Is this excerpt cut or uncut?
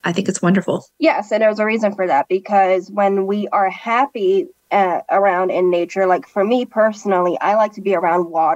cut